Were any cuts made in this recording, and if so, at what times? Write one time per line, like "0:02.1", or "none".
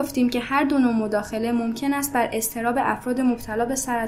none